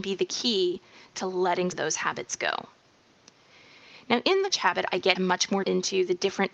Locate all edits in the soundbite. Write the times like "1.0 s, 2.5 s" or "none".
1.7 s, 4.5 s, 5.2 s, 5.6 s